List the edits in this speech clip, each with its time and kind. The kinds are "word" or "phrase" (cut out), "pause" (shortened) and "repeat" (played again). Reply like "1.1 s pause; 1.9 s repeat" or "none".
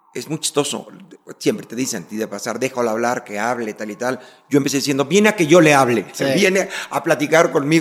none